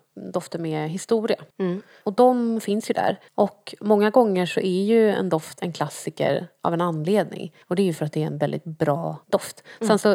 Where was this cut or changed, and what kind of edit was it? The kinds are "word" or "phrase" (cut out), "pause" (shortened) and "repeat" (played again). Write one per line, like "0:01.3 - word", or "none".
0:01.5 - pause
0:03.3 - pause
0:07.6 - pause
0:09.2 - pause

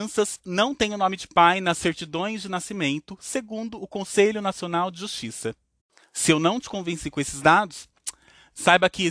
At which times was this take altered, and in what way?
none

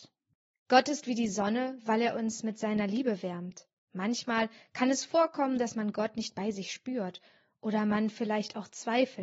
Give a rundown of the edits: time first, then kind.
none

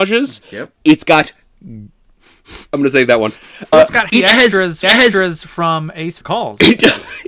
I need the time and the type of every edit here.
0:02.6 - pause
0:03.7 - word
0:04.1 - word
0:04.8 - repeat
0:06.2 - phrase

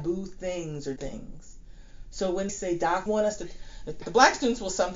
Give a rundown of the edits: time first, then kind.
0:01.0 - word
0:02.5 - word
0:03.1 - word
0:04.0 - word

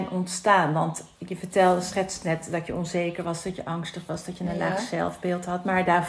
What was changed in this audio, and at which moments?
none

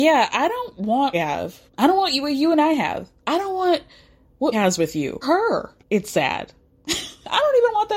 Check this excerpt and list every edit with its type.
0:01.1 - phrase
0:01.7 - pause
0:03.2 - pause
0:04.5 - word
0:05.2 - word
0:05.8 - pause

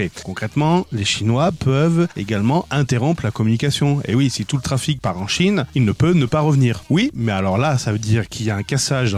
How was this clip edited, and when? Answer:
none

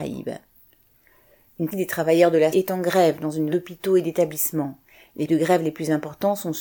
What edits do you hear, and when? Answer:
0:01.7 - word
0:02.5 - word
0:03.5 - word
0:05.3 - word

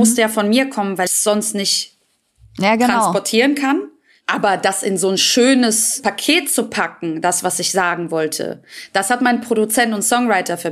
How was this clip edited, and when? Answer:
0:01.1 - word

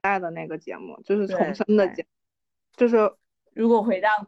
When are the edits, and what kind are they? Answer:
none

